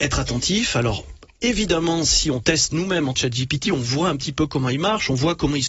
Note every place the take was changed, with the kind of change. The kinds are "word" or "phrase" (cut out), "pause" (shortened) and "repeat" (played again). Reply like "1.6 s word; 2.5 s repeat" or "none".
3.2 s phrase